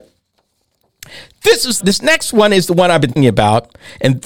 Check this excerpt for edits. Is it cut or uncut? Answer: cut